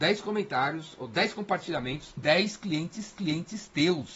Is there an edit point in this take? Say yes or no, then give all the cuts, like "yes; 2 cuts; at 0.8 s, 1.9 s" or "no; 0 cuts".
yes; 2 cuts; at 2.2 s, 3.1 s